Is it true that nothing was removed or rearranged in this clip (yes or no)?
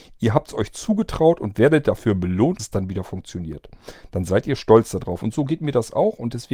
no